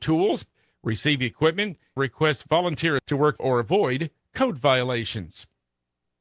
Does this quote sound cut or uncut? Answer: cut